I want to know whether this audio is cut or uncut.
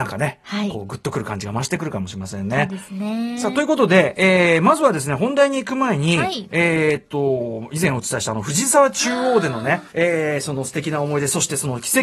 cut